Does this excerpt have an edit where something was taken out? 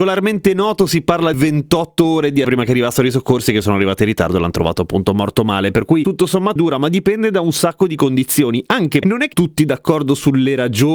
yes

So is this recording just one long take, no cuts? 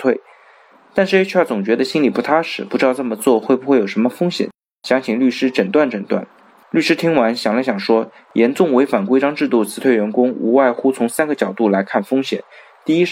yes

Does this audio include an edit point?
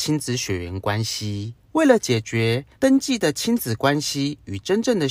yes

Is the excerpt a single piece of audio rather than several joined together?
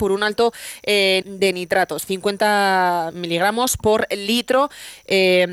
no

